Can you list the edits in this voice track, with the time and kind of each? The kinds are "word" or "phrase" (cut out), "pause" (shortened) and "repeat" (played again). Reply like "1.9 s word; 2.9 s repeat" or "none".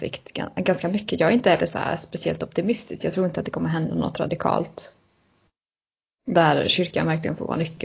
none